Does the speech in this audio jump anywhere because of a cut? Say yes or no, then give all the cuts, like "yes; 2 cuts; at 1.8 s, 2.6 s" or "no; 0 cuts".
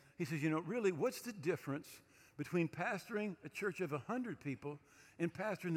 no; 0 cuts